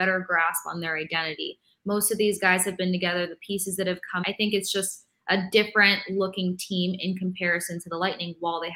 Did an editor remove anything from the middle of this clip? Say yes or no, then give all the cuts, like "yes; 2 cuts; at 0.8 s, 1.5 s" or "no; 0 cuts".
yes; 1 cut; at 4.2 s